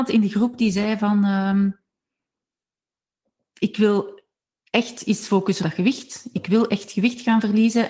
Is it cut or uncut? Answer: cut